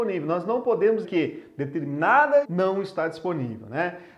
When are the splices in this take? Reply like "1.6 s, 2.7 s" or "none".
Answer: 1.0 s, 2.4 s